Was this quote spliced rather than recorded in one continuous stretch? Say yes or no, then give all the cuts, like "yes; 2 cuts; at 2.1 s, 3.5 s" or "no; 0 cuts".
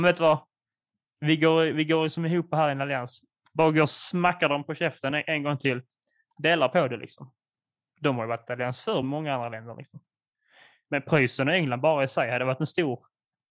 no; 0 cuts